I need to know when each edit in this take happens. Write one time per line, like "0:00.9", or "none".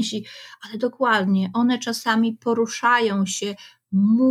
none